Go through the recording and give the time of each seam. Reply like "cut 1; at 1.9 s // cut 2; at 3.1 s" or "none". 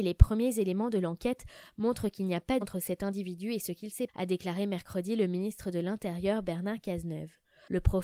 cut 1; at 2.6 s // cut 2; at 4.1 s